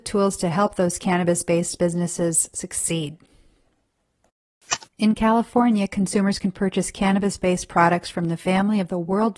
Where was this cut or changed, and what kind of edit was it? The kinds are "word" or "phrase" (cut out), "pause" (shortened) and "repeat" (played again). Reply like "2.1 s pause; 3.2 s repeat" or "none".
4.9 s pause